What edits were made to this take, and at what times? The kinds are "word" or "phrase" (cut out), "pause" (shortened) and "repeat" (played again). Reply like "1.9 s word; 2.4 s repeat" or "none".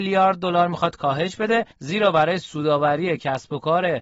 1.7 s pause